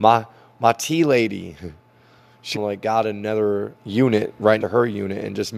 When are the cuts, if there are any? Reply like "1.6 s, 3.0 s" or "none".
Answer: 2.5 s, 3.8 s, 4.6 s